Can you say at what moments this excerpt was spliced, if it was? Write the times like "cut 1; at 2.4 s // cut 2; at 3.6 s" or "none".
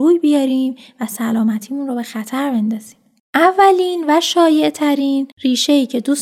none